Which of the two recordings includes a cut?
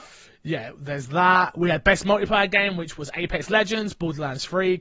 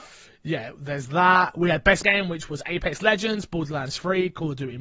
second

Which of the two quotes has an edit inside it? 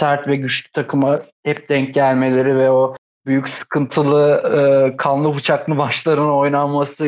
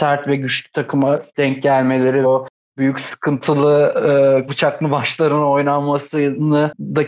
second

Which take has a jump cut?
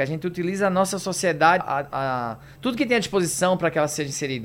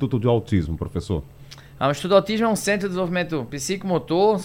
first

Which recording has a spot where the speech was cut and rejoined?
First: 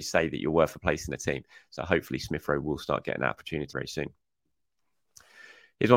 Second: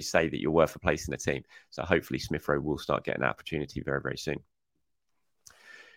first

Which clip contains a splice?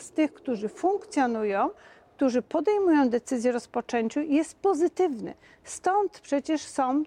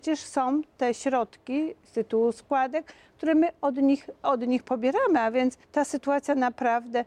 second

